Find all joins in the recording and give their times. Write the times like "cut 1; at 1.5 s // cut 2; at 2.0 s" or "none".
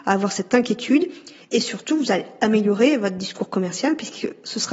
none